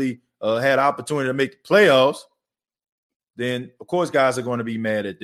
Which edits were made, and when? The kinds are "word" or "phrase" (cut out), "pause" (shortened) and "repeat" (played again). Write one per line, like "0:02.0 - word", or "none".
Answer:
none